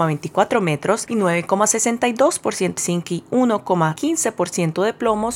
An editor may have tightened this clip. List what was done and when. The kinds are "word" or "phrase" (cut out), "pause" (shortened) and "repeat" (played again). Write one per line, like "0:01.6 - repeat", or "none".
0:02.8 - word